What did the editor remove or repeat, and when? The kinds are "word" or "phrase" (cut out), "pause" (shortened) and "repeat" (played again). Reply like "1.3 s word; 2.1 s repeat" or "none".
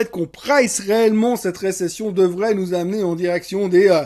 none